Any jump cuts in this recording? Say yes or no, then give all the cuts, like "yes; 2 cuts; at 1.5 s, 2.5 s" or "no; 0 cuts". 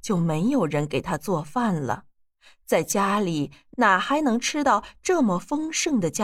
no; 0 cuts